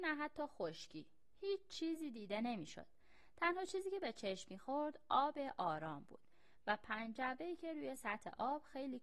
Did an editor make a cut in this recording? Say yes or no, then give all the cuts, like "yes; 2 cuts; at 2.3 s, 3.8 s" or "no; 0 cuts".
no; 0 cuts